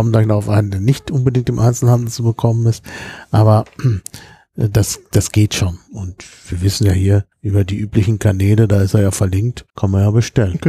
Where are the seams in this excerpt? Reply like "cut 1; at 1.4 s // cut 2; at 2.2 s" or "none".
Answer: cut 1; at 7.3 s // cut 2; at 9.7 s